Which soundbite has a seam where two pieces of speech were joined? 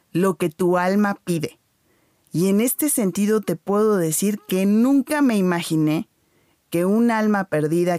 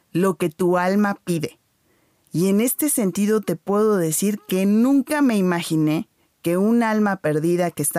second; 1 cut; at 6.2 s

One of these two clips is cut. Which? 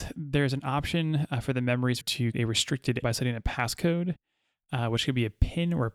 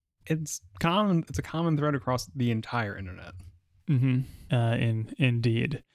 first; 3 cuts; at 2.0 s, 2.3 s, 3.0 s

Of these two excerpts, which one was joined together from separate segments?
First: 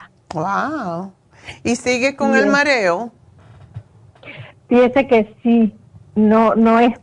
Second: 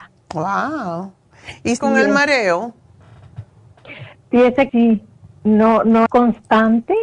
second; 3 cuts; at 1.8 s, 4.7 s, 6.1 s

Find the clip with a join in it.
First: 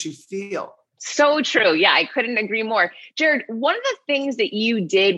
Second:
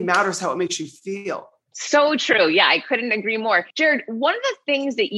second; 1 cut; at 3.7 s

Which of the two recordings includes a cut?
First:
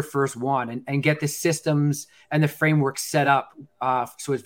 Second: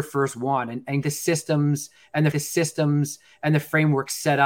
second; 2 cuts; at 1.0 s, 2.3 s

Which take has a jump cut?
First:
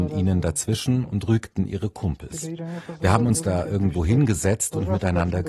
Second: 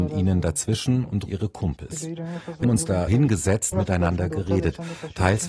second; 4 cuts; at 1.3 s, 2.6 s, 3.1 s, 3.7 s

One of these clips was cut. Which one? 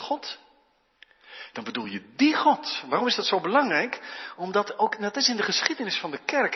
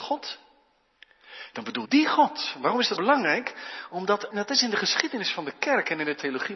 second; 3 cuts; at 1.8 s, 3.0 s, 4.3 s

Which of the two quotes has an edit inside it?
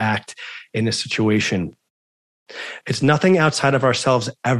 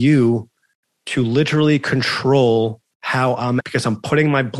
second; 2 cuts; at 2.9 s, 3.6 s

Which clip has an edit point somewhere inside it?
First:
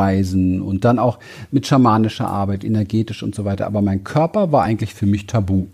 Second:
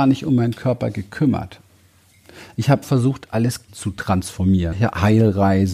second; 3 cuts; at 2.8 s, 3.7 s, 4.7 s

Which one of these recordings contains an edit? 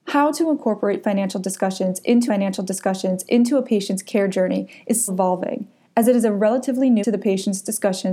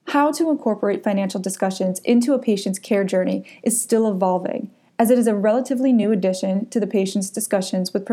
first; 3 cuts; at 2.3 s, 5.1 s, 7.0 s

